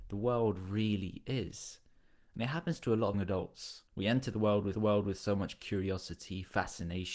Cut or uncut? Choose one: cut